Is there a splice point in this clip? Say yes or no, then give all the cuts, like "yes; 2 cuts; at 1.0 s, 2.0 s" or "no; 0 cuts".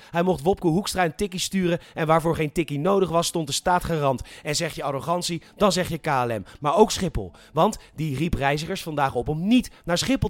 no; 0 cuts